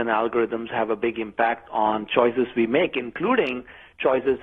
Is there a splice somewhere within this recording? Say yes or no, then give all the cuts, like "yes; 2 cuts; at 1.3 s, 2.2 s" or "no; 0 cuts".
no; 0 cuts